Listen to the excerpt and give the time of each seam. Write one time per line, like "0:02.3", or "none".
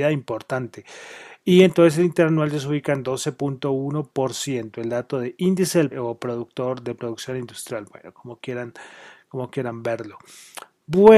0:05.9